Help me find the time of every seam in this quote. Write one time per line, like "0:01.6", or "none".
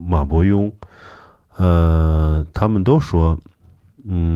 none